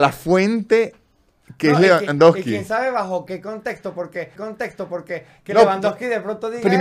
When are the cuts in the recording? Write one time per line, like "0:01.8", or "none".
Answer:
0:04.4